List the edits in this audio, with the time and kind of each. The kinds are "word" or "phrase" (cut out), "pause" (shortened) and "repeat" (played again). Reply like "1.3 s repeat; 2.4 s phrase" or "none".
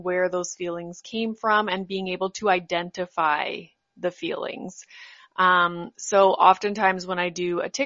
none